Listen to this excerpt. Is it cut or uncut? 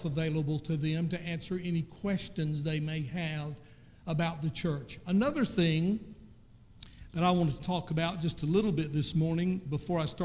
uncut